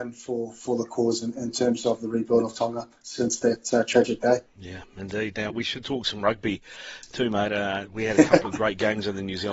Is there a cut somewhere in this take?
yes; 2 cuts; at 4.5 s, 5.5 s

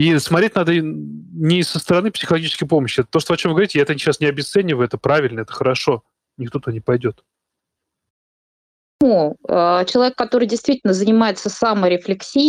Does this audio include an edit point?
no; 0 cuts

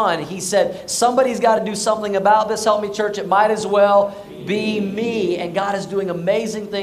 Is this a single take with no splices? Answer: yes; 0 cuts

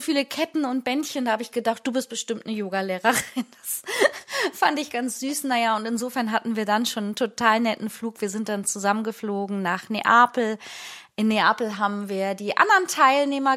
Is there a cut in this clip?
no; 0 cuts

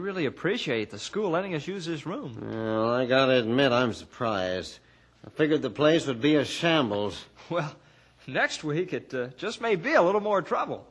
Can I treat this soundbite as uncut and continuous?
yes; 0 cuts

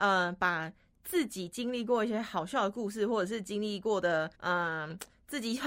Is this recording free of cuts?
no; 1 cut; at 4.3 s

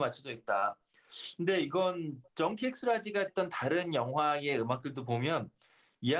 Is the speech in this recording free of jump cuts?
no; 2 cuts; at 2.3 s, 3.3 s

